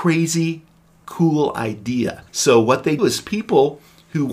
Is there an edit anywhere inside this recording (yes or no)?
yes